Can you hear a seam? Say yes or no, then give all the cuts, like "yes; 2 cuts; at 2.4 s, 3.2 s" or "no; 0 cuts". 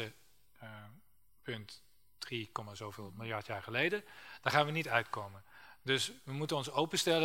no; 0 cuts